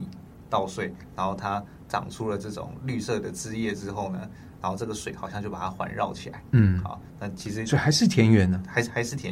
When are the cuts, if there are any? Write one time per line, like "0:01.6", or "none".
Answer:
none

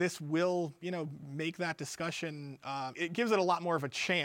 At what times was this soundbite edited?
0:02.9

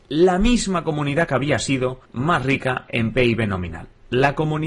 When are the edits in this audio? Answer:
0:02.1

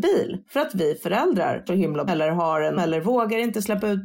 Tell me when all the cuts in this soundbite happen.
0:01.7
0:02.1
0:02.8

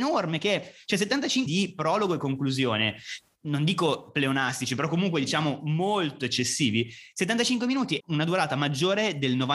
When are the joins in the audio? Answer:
0:01.5
0:08.0

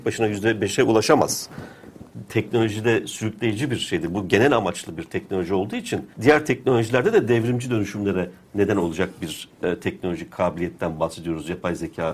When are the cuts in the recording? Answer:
0:06.1

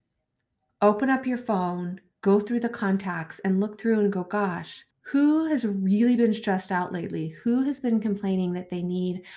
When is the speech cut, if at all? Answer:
0:04.9

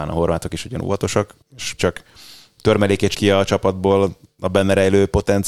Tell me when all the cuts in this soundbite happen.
0:01.4
0:01.8
0:03.1

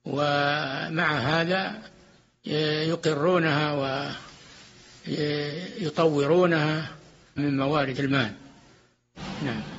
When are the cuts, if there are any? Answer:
0:07.4
0:08.0

